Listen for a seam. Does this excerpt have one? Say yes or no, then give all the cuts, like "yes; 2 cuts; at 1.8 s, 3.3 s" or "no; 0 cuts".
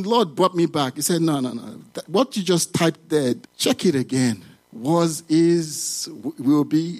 yes; 1 cut; at 3.4 s